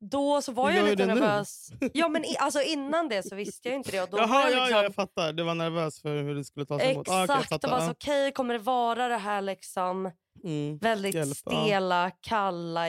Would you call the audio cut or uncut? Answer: uncut